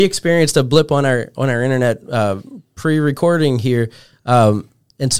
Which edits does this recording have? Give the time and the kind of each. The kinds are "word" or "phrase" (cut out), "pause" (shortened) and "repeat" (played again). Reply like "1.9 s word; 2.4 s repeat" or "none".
none